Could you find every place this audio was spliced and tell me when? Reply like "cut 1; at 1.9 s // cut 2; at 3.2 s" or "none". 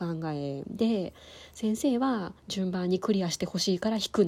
cut 1; at 2.4 s